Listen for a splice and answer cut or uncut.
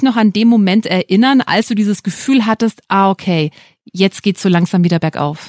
uncut